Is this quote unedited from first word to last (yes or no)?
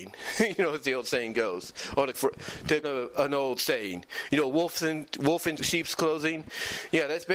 no